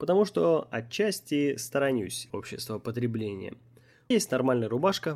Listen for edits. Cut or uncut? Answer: cut